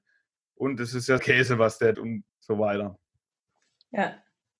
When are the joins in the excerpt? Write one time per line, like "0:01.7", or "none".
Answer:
0:01.2
0:01.9
0:02.3